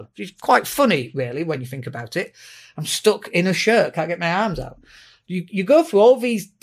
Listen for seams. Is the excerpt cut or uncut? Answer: uncut